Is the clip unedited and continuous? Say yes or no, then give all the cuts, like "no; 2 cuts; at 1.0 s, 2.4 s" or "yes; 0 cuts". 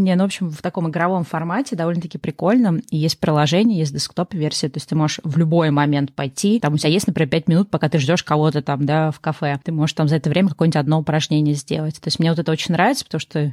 yes; 0 cuts